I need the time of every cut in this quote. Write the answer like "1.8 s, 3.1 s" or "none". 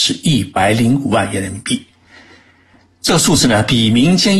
none